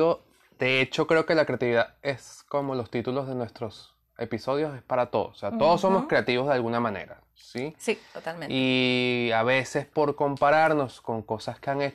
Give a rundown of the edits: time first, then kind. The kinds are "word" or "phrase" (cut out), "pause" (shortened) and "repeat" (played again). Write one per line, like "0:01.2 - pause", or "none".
none

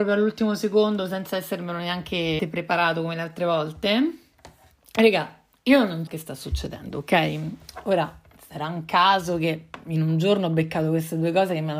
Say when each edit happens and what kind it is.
0:02.4 - word
0:06.1 - word

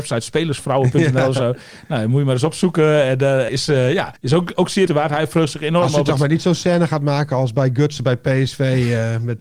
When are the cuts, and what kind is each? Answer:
0:03.5 - word
0:04.2 - pause
0:04.9 - word

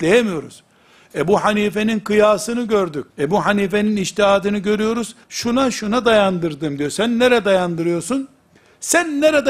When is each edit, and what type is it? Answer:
0:03.1 - pause
0:05.2 - pause

